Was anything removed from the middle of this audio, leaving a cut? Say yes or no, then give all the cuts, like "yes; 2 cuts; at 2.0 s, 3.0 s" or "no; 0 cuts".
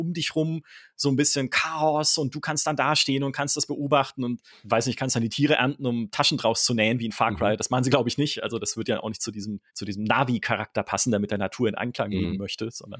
yes; 2 cuts; at 4.5 s, 9.7 s